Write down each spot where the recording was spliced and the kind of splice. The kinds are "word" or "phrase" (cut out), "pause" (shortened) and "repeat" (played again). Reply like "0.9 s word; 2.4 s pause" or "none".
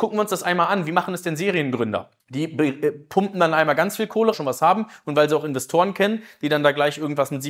2.2 s pause; 4.3 s phrase